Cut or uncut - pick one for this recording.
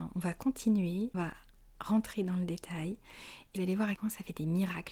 cut